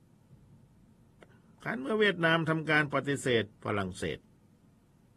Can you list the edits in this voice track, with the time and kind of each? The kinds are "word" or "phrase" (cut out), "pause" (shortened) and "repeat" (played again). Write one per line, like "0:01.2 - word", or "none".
0:03.5 - pause